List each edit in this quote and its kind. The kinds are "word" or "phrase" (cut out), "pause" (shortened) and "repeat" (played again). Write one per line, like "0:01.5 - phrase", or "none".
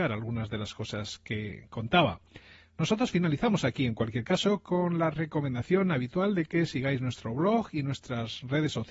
none